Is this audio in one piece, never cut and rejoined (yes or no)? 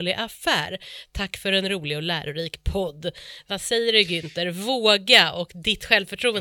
yes